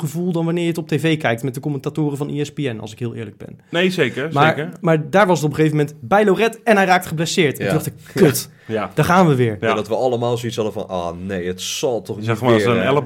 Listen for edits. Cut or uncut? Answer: uncut